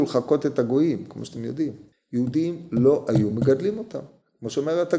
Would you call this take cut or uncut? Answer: uncut